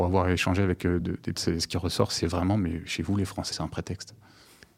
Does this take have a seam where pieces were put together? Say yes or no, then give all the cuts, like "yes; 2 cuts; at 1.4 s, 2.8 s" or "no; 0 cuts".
yes; 3 cuts; at 1.0 s, 1.3 s, 3.5 s